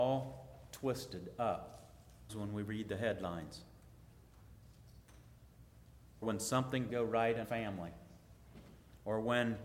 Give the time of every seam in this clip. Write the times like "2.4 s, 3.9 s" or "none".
2.3 s, 6.2 s, 6.9 s, 7.4 s

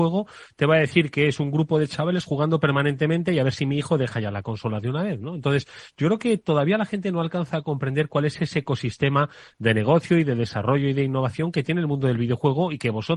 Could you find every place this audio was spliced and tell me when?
none

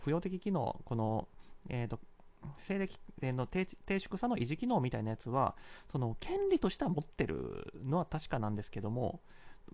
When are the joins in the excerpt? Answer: none

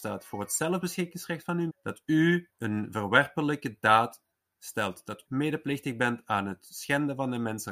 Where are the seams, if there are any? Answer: 1.7 s, 2.5 s, 4.3 s, 5.3 s

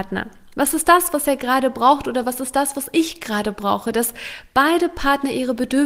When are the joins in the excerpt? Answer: none

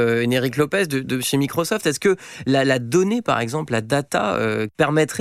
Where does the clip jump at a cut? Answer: none

